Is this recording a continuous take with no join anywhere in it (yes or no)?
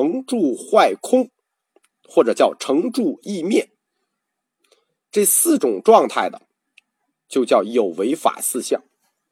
yes